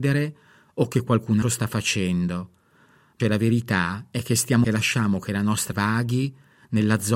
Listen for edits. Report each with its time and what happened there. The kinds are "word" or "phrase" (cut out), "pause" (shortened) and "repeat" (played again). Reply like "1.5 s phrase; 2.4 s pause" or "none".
1.4 s word; 3.2 s word; 4.6 s phrase; 5.7 s word